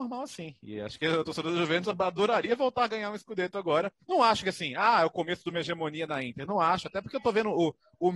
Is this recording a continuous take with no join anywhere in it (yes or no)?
no